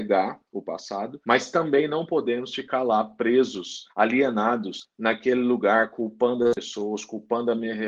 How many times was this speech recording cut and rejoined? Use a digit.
2